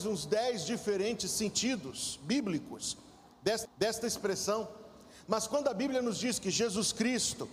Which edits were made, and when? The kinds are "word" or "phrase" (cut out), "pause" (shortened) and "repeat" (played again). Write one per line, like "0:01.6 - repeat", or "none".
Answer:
0:03.7 - repeat